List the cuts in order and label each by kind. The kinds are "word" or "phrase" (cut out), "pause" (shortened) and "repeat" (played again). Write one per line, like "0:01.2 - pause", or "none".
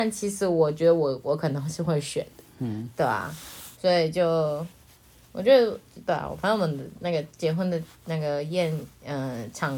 0:03.7 - pause